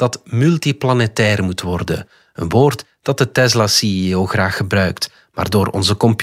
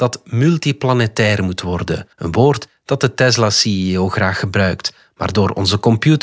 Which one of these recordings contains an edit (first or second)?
second